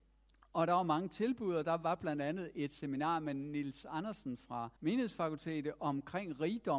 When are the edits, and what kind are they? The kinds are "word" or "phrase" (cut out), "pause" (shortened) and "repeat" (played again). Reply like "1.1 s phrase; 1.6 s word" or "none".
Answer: 4.8 s pause